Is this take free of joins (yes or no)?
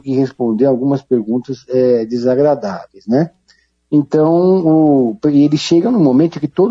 yes